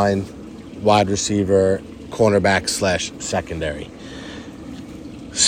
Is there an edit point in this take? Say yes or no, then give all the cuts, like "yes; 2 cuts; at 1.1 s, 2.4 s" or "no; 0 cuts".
no; 0 cuts